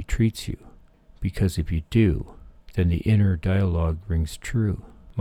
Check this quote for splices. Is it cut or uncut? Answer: uncut